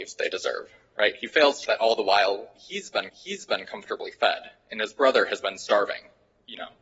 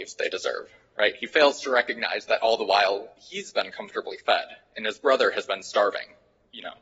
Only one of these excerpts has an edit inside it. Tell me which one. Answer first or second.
first